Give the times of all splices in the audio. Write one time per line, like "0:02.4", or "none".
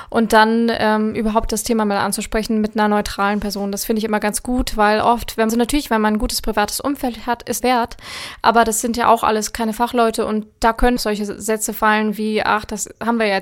0:05.5
0:07.6
0:11.0